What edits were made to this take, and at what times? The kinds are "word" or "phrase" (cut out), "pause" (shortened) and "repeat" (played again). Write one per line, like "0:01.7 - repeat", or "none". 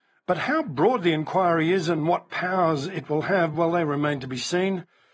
none